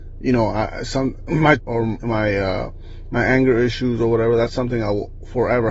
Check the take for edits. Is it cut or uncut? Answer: cut